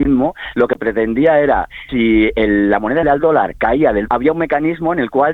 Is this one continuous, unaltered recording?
no; 3 cuts; at 1.9 s, 3.0 s, 4.1 s

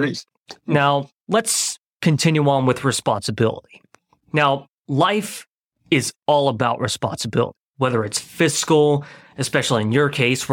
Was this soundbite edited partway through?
yes; 2 cuts; at 1.2 s, 4.8 s

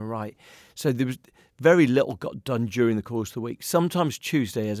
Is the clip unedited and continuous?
yes; 0 cuts

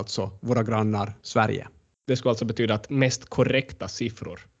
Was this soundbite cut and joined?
no; 0 cuts

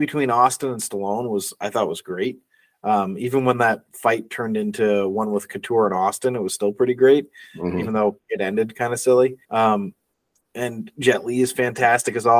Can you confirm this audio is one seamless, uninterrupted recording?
no; 1 cut; at 9.4 s

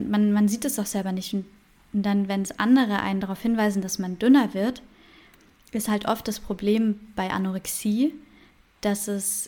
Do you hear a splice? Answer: no; 0 cuts

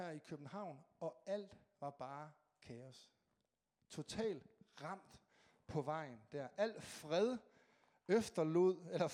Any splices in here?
no; 0 cuts

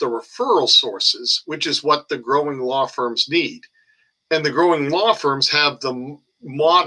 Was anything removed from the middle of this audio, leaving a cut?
no; 0 cuts

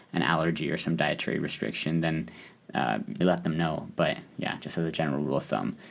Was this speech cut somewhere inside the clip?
yes; 1 cut; at 3.2 s

